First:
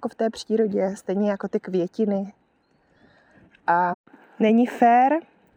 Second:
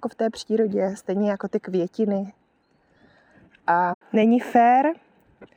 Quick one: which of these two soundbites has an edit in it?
second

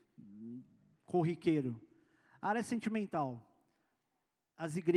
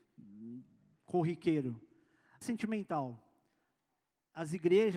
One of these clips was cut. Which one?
second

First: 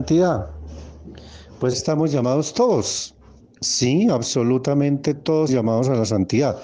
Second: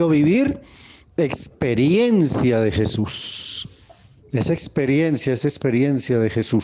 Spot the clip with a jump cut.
first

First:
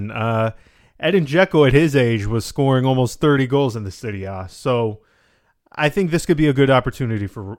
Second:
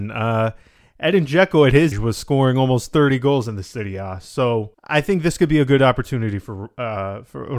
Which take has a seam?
second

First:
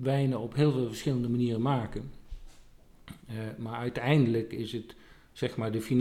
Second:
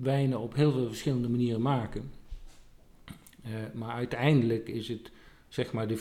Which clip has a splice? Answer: first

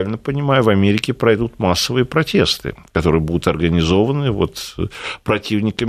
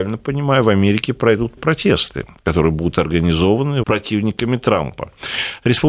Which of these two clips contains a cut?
second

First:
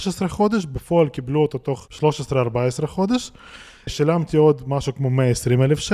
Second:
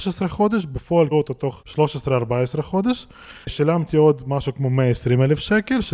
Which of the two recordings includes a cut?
second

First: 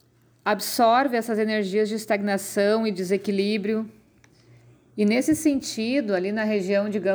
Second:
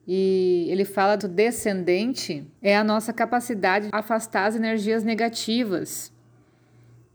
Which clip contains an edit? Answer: second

